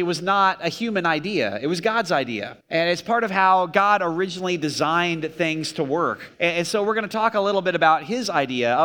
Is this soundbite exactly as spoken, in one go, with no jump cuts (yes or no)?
no